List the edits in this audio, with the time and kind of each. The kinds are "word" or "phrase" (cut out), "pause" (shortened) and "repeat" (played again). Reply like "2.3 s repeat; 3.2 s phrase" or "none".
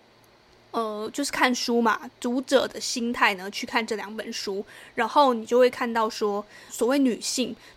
6.7 s word